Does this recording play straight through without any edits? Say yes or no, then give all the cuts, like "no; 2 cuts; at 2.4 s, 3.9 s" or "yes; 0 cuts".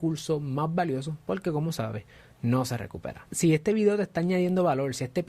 yes; 0 cuts